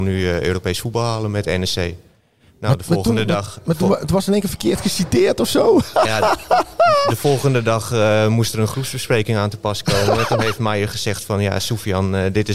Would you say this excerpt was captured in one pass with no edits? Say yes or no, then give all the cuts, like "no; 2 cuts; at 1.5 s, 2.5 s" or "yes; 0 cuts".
yes; 0 cuts